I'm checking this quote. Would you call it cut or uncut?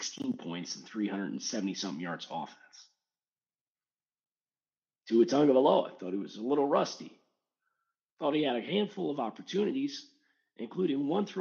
uncut